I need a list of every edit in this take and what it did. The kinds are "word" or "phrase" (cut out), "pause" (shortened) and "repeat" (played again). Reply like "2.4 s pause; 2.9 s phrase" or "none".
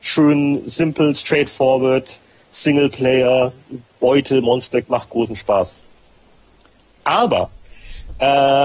4.8 s word